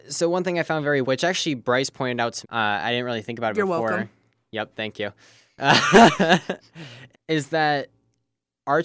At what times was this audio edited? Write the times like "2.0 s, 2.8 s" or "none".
1.0 s, 2.4 s, 7.1 s